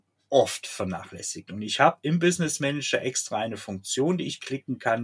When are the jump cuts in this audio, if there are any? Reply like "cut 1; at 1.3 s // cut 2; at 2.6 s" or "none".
none

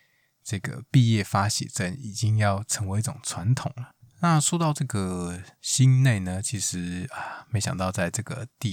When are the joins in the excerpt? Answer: cut 1; at 5.5 s

